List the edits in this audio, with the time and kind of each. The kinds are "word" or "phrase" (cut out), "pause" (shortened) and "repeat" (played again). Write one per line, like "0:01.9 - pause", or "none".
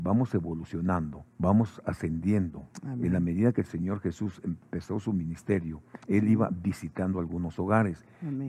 0:01.3 - pause
0:06.0 - pause